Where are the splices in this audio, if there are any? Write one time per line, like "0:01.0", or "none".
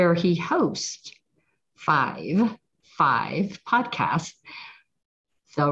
0:02.8